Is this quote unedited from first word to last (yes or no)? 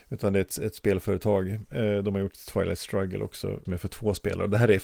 no